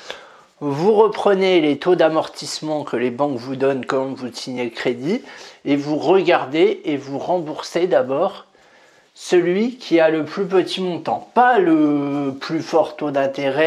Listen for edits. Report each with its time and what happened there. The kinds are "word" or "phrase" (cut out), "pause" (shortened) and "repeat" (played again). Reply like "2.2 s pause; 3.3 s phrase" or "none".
none